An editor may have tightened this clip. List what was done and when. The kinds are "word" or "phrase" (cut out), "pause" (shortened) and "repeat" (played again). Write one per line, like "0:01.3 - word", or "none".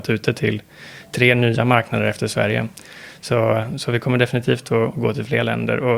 none